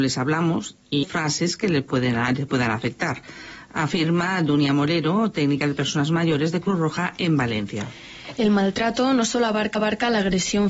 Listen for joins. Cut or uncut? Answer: cut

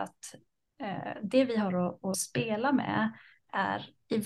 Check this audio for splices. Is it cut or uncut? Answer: cut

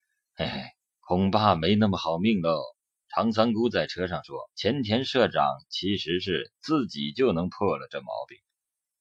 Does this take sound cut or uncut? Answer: cut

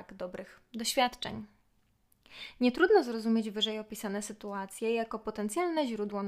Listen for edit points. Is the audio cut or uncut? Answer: uncut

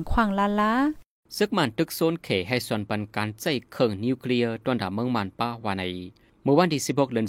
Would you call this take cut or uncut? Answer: uncut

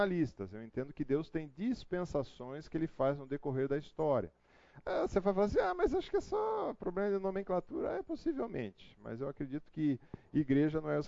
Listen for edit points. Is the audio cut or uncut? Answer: uncut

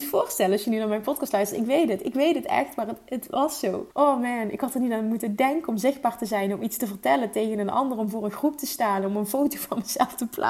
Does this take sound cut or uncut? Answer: cut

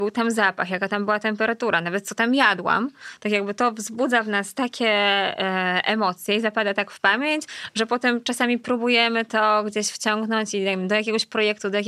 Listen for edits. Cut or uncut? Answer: uncut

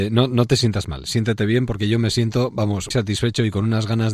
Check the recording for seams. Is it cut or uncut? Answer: cut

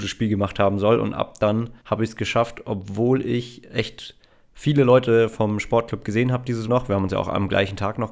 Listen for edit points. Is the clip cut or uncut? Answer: cut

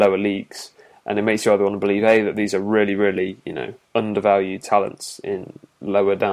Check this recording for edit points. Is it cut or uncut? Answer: cut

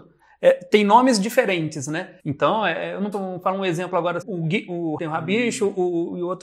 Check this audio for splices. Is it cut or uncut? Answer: cut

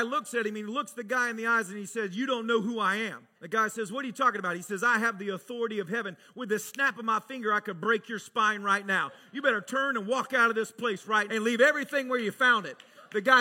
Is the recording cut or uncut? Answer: cut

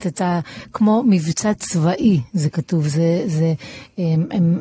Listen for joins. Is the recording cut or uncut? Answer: uncut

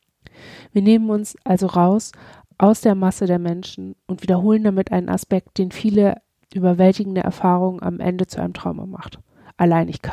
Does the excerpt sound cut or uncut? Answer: uncut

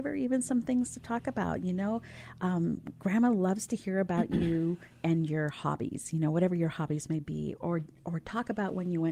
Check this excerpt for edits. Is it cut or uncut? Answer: uncut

